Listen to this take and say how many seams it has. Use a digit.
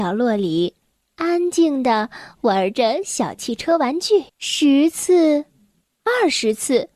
1